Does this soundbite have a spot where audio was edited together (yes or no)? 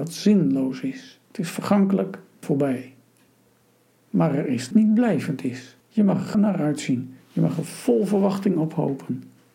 yes